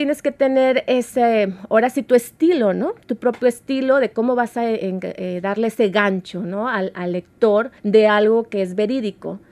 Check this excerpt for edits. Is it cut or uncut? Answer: cut